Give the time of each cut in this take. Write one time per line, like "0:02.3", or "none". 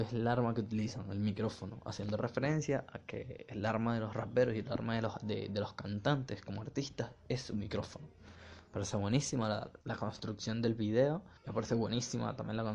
0:09.8
0:11.4